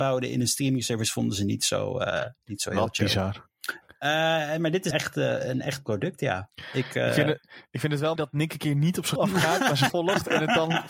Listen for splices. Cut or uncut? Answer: cut